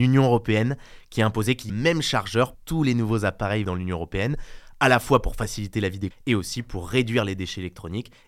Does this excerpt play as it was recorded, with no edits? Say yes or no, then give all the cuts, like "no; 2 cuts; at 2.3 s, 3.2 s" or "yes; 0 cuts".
no; 4 cuts; at 1.7 s, 2.5 s, 3.6 s, 6.1 s